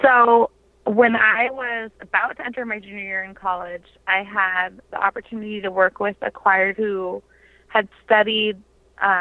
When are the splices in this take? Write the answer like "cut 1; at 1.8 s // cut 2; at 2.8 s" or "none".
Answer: cut 1; at 4.9 s // cut 2; at 6.7 s